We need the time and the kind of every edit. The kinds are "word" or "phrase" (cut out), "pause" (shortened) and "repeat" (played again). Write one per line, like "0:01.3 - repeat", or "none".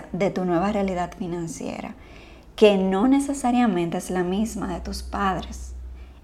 none